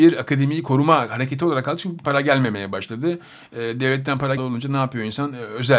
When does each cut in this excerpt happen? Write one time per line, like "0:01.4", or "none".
0:02.0
0:04.4